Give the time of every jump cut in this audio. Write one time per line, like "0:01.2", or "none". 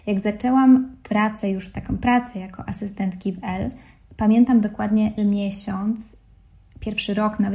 0:05.2